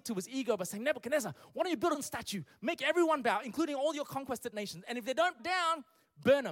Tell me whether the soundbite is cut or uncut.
cut